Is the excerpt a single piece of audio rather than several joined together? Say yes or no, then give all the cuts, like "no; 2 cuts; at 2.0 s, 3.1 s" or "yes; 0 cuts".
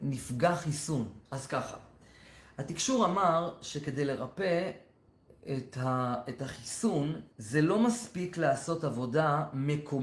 no; 2 cuts; at 1.2 s, 7.3 s